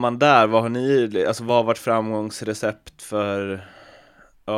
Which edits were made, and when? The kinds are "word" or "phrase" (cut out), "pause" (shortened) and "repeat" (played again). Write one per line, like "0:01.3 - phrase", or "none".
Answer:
none